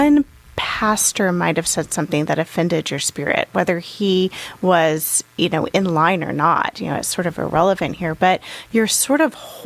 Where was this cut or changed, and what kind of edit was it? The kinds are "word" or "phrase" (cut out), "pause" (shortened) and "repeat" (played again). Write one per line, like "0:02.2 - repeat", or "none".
none